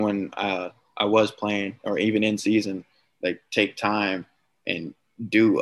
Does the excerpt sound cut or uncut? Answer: uncut